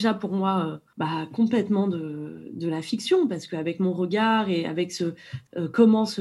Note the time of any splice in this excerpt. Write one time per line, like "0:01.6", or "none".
none